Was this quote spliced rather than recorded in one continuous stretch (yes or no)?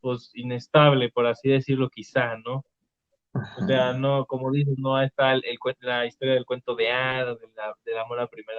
yes